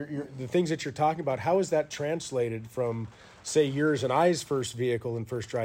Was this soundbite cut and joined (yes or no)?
no